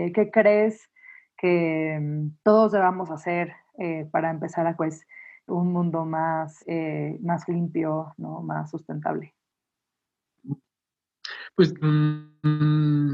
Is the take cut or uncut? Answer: cut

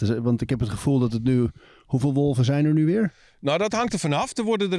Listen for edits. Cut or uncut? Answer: uncut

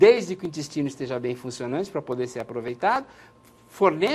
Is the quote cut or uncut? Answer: uncut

